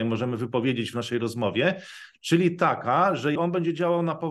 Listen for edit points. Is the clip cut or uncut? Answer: cut